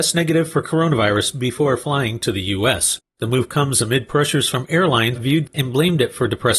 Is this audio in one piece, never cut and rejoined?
no; 2 cuts; at 5.1 s, 5.5 s

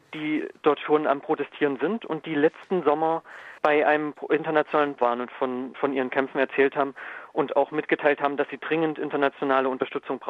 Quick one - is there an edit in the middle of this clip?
yes; 4 cuts; at 3.6 s, 5.0 s, 5.7 s, 7.5 s

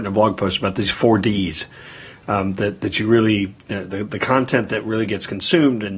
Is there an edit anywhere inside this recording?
no; 0 cuts

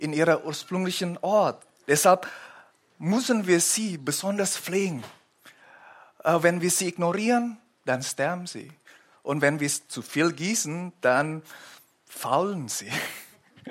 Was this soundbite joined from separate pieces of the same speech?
no; 0 cuts

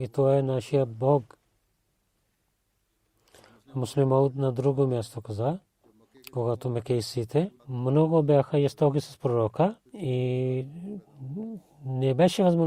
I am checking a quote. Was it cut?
yes; 2 cuts; at 7.6 s, 9.9 s

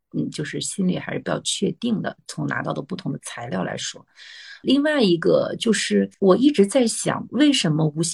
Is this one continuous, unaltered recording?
no; 1 cut; at 6.1 s

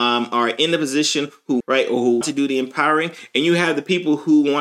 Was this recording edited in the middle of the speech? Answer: yes; 2 cuts; at 1.6 s, 2.2 s

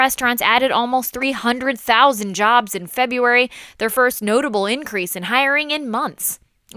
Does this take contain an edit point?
no; 0 cuts

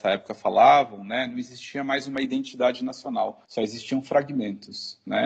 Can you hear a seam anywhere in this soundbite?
yes; 1 cut; at 3.5 s

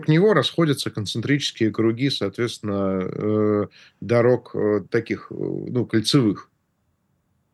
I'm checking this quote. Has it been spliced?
no; 0 cuts

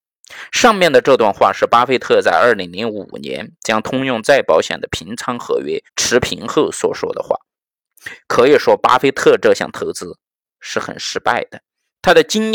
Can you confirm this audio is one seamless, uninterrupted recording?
no; 1 cut; at 5.9 s

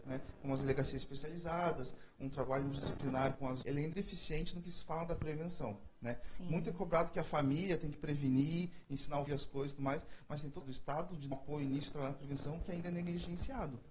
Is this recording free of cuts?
no; 6 cuts; at 3.6 s, 3.9 s, 5.9 s, 9.3 s, 10.6 s, 11.3 s

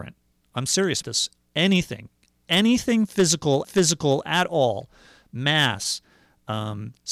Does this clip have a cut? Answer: yes; 2 cuts; at 1.0 s, 3.6 s

